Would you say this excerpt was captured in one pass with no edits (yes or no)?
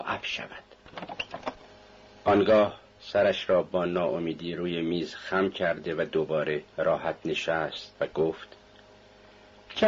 no